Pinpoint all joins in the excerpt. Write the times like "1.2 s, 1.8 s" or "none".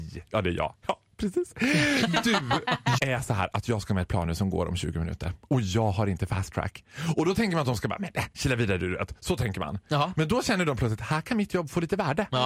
3.0 s